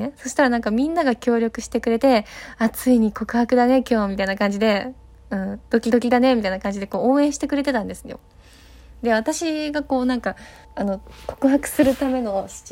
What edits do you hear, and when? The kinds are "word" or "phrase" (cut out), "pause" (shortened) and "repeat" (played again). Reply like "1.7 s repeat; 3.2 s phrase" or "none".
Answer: 10.6 s pause